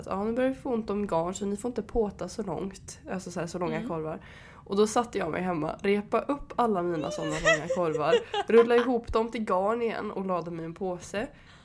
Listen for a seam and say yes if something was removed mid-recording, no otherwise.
no